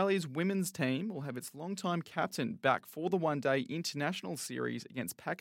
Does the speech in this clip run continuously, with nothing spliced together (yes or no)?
yes